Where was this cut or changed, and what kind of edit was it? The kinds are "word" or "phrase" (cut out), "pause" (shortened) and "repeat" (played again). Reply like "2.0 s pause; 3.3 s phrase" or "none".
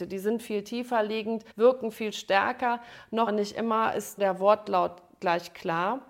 1.5 s pause; 3.3 s word; 4.2 s word